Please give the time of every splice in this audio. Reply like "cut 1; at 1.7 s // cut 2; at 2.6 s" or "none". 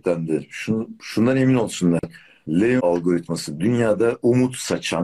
cut 1; at 2.8 s